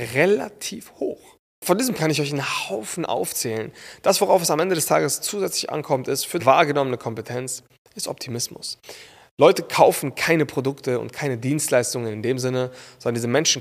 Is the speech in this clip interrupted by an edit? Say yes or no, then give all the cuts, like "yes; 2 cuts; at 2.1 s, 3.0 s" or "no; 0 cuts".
yes; 2 cuts; at 2.0 s, 6.4 s